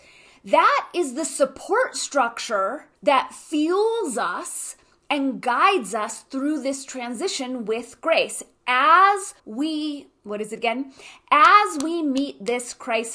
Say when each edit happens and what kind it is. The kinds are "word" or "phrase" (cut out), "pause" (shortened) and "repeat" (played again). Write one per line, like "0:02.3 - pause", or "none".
0:02.9 - pause
0:09.4 - pause